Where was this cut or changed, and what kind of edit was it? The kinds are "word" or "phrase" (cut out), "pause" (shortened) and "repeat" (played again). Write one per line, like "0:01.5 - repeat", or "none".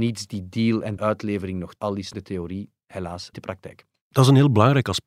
0:01.0 - word
0:01.8 - word
0:02.1 - word
0:03.3 - word